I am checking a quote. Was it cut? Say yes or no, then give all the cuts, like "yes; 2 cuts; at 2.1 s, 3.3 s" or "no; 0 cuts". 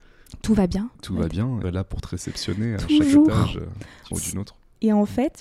yes; 3 cuts; at 1.0 s, 1.6 s, 4.1 s